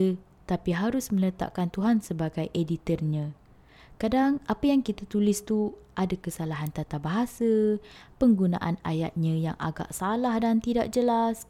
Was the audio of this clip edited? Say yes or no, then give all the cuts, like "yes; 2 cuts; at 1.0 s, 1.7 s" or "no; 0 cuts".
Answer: no; 0 cuts